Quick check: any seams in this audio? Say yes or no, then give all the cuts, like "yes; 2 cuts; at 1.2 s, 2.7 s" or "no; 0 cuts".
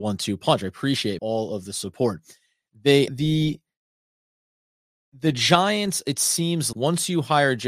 yes; 3 cuts; at 1.2 s, 3.1 s, 6.7 s